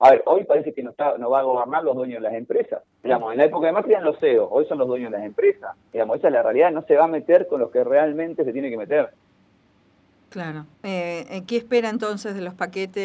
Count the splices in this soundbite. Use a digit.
3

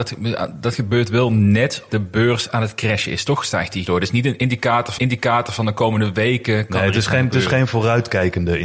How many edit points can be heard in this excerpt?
3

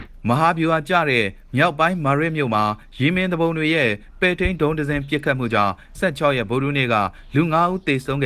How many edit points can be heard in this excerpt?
1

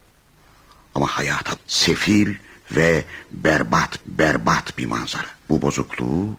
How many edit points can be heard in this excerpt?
3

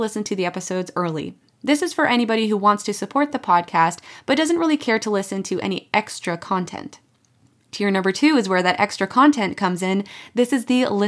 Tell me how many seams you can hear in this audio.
0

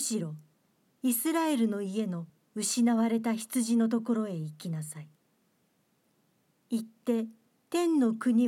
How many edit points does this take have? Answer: 0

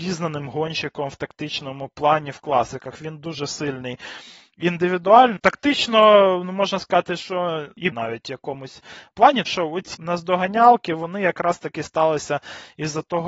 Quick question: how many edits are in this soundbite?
4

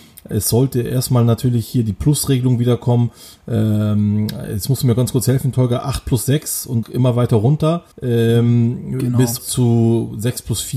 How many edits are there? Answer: 3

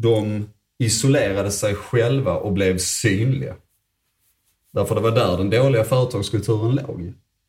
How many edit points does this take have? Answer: 0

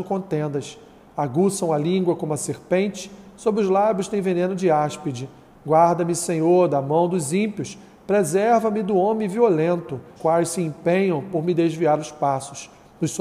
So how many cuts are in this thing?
1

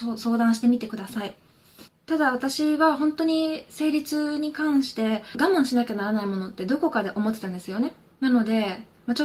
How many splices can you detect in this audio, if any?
1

